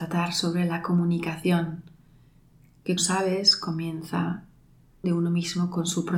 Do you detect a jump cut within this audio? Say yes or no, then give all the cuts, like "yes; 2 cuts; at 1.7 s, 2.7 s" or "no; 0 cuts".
yes; 2 cuts; at 3.0 s, 5.0 s